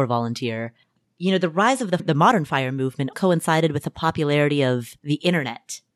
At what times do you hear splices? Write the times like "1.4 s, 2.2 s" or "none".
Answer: 2.0 s, 3.1 s, 5.0 s